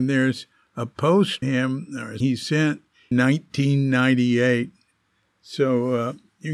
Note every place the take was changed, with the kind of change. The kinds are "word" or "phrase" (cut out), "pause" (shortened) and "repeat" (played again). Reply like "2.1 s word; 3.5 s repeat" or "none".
1.4 s word; 2.2 s word; 3.1 s word